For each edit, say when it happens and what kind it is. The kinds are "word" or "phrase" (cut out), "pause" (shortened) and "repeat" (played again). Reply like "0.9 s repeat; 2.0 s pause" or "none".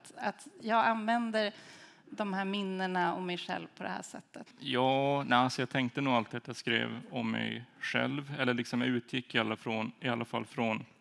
4.5 s pause